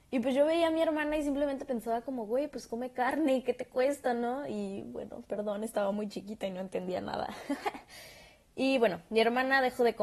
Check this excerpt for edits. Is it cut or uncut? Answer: uncut